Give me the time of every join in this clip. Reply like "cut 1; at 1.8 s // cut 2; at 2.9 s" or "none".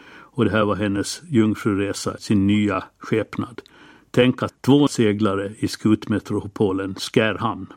cut 1; at 2.2 s // cut 2; at 4.5 s // cut 3; at 4.9 s